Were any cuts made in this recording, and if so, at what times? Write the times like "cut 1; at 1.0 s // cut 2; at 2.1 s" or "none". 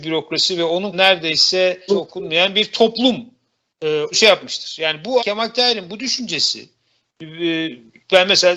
cut 1; at 0.9 s // cut 2; at 1.9 s // cut 3; at 4.1 s // cut 4; at 5.2 s